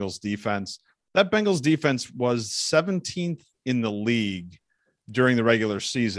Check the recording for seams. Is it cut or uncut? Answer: uncut